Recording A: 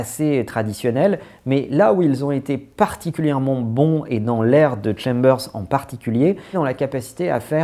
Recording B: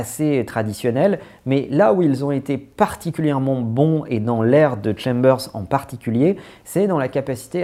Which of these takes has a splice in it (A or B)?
A